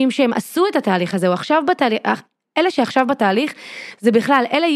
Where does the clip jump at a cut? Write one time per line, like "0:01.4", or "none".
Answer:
none